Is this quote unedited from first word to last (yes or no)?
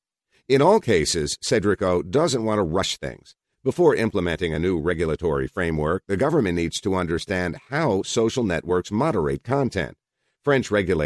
yes